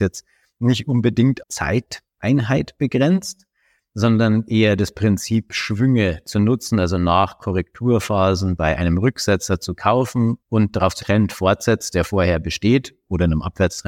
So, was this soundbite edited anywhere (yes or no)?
yes